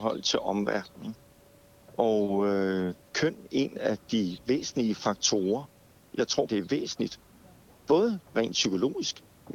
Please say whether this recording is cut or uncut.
cut